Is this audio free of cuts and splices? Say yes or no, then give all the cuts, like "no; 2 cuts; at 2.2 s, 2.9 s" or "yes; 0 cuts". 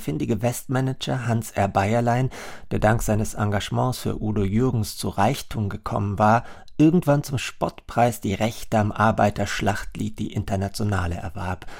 yes; 0 cuts